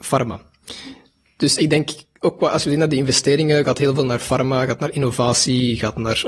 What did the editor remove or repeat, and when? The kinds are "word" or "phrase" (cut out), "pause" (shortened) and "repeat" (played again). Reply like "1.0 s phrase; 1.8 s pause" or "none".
none